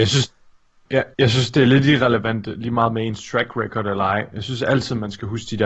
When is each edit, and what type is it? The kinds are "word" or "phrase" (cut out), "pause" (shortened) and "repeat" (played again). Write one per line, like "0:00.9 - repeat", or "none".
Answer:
0:01.1 - pause